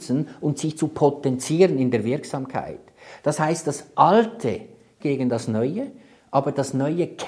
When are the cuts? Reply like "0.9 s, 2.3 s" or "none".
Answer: 5.0 s